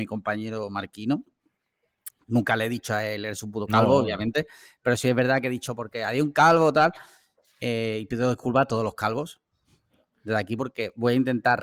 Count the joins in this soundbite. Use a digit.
0